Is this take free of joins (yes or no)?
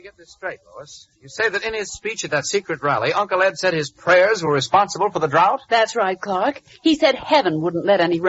yes